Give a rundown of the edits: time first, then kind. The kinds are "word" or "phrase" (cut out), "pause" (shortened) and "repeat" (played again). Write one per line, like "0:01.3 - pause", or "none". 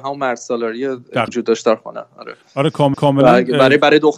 0:01.3 - word
0:02.4 - pause
0:02.9 - repeat